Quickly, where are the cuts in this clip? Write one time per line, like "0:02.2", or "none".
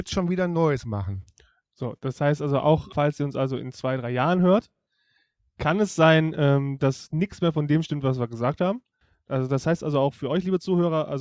none